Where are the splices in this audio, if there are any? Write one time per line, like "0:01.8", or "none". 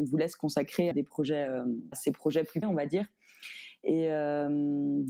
0:00.9
0:01.9
0:02.6